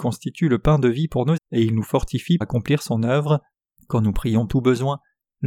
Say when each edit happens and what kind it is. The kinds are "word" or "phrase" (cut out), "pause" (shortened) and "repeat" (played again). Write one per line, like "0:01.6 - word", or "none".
0:01.4 - word
0:02.4 - word
0:03.5 - pause
0:04.5 - word